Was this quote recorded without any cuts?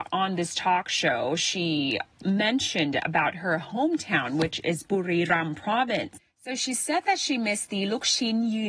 yes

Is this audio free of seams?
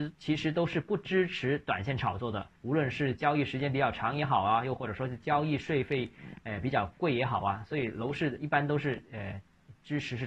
no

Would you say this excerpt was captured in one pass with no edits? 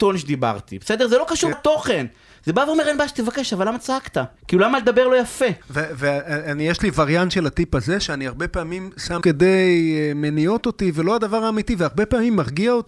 no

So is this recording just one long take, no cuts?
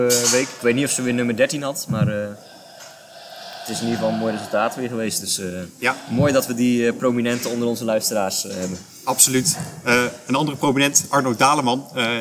yes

